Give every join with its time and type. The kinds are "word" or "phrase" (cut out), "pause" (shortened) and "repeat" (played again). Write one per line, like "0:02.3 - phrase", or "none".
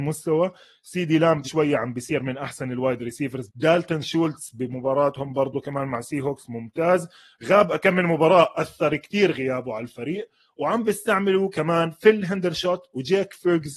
0:01.4 - word
0:03.5 - word